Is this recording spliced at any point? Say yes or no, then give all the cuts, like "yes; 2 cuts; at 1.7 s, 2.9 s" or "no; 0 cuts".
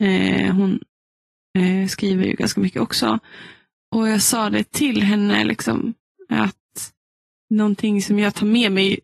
no; 0 cuts